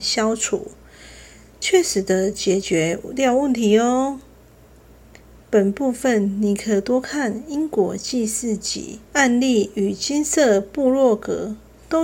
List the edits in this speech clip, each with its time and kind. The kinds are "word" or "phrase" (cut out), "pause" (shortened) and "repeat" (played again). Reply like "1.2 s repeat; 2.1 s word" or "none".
9.1 s pause